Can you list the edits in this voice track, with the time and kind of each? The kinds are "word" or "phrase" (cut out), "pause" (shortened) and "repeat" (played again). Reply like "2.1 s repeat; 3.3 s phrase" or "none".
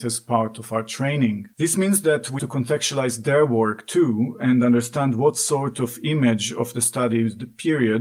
1.5 s pause; 2.4 s word